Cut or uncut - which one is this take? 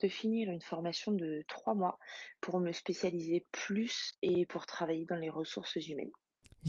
uncut